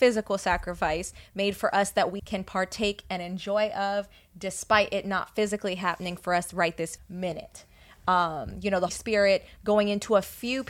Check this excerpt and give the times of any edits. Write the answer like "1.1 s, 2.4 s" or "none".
2.2 s, 7.0 s, 8.9 s